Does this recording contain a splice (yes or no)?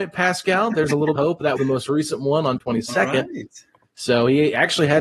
yes